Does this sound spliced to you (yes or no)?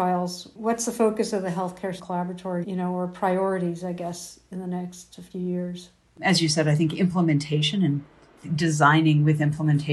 yes